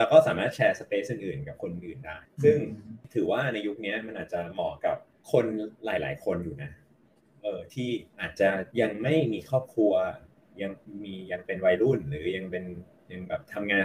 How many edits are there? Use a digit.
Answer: 0